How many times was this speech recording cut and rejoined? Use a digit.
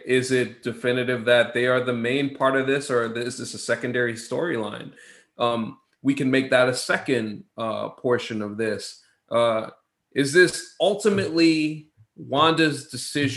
0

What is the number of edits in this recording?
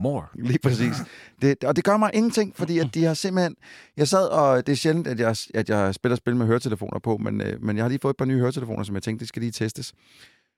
0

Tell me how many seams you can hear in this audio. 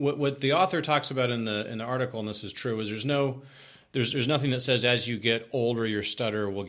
0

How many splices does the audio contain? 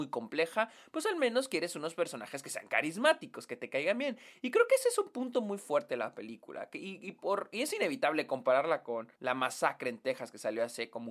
1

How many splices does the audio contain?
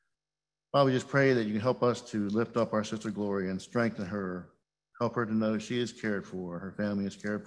0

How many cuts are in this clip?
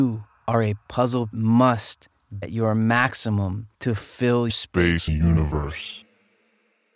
5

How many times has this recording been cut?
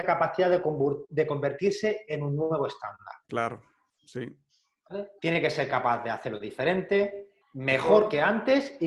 3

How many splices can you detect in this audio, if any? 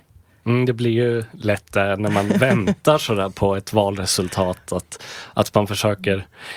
0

